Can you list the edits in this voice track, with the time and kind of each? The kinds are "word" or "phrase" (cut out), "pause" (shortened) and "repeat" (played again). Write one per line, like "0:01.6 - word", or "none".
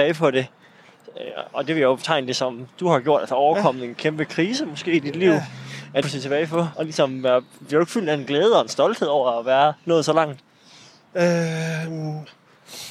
0:06.0 - phrase
0:06.7 - word